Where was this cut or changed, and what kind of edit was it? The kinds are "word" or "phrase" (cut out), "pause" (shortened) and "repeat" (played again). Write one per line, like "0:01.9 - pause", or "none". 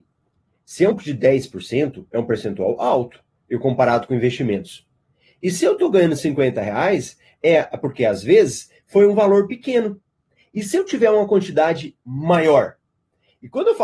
0:00.9 - word